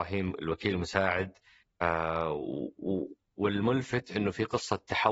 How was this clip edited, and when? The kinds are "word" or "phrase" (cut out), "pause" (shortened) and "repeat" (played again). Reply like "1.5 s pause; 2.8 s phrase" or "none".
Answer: 1.6 s phrase